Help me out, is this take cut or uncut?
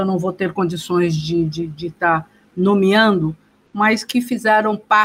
uncut